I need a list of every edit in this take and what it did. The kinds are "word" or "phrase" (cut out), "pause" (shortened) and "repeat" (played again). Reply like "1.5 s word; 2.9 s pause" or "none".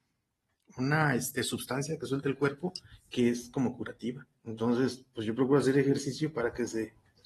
none